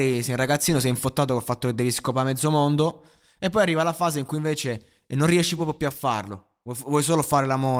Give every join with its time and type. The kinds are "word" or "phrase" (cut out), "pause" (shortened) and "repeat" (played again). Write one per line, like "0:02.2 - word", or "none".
none